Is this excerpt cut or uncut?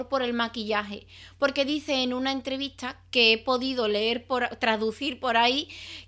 uncut